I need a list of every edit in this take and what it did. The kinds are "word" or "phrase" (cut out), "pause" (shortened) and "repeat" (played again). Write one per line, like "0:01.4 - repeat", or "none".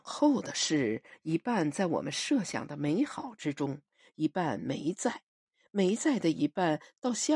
none